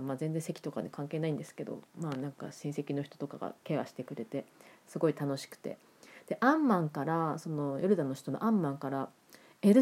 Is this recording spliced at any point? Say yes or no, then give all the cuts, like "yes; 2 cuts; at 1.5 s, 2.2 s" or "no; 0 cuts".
no; 0 cuts